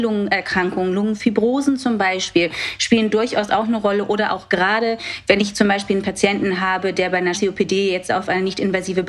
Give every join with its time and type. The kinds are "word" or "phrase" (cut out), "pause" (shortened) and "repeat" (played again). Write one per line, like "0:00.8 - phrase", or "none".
0:07.3 - word